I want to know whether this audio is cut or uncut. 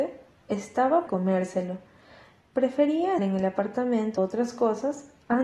cut